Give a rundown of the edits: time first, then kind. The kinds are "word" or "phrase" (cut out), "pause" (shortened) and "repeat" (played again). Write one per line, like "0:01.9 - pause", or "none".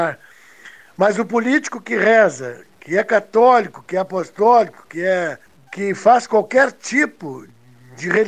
0:05.5 - pause